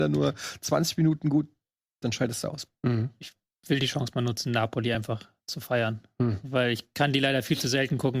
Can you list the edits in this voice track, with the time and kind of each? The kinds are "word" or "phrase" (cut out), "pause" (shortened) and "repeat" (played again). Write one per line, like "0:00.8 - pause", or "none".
none